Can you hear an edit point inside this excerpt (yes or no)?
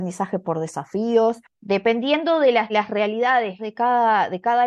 yes